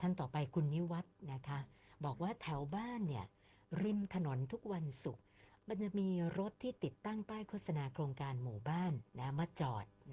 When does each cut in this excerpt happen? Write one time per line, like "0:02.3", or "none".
0:09.1